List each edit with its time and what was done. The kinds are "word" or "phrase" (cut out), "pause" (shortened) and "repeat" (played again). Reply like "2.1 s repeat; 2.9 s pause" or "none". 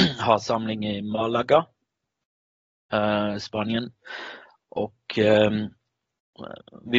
none

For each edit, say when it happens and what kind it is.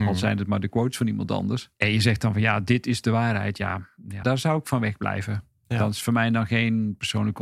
1.7 s pause; 4.2 s word

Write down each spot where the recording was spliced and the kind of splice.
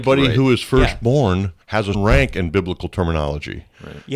1.6 s pause; 1.9 s word

